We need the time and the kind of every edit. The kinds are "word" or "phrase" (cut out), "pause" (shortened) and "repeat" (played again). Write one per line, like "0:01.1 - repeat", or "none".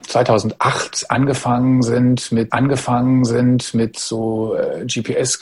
0:02.5 - repeat